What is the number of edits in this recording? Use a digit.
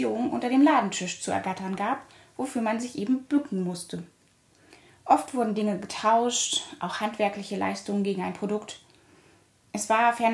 0